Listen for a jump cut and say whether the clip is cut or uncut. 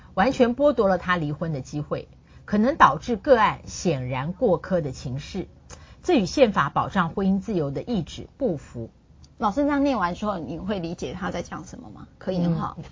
cut